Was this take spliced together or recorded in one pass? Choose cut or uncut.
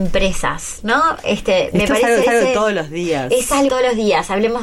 cut